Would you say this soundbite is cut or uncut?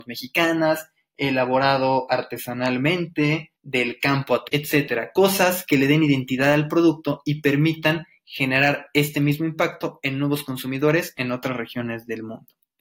cut